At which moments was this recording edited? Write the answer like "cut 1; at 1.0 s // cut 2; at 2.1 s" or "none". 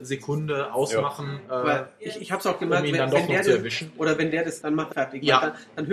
cut 1; at 4.6 s // cut 2; at 4.9 s